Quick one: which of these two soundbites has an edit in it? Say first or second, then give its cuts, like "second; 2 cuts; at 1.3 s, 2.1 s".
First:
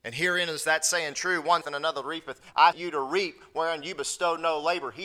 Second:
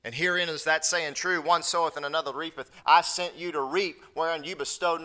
first; 2 cuts; at 1.6 s, 2.7 s